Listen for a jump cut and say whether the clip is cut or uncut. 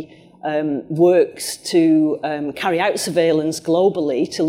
uncut